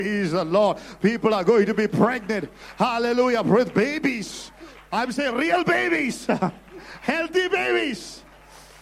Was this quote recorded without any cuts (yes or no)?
yes